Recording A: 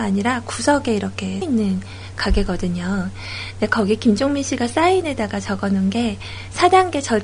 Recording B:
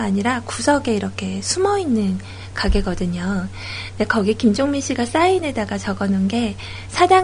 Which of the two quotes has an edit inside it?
A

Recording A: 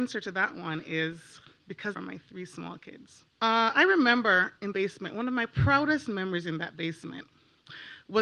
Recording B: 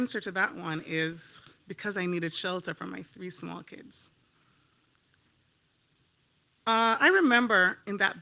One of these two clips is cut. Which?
A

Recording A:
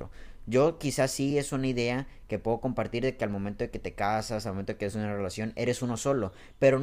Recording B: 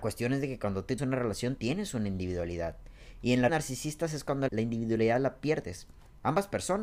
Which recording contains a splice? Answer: B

